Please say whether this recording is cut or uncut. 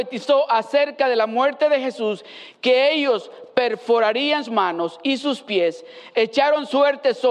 cut